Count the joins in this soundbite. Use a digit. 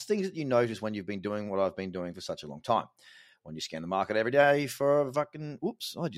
0